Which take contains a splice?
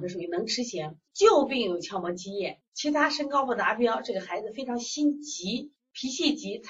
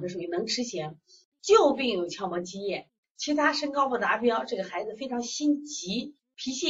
first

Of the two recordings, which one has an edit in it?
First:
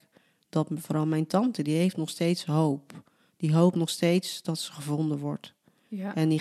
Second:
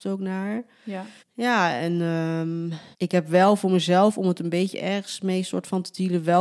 second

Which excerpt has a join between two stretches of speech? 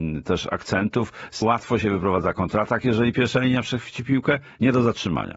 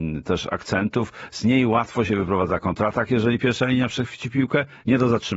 first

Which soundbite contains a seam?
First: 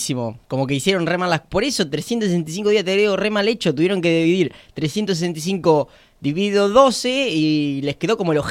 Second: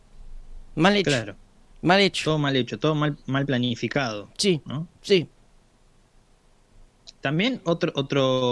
second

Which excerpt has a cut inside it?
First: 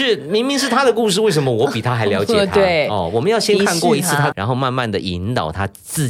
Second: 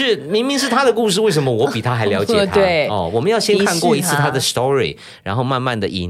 first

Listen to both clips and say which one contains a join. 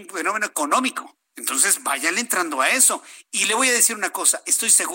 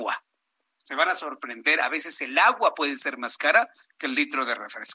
first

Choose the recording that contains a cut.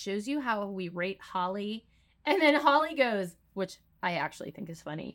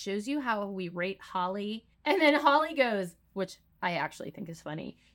second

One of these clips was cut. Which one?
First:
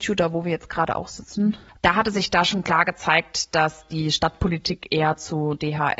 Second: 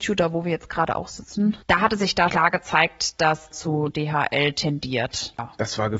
second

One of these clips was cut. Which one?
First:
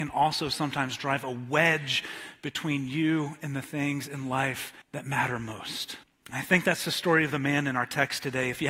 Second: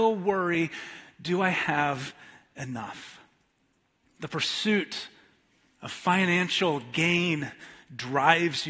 first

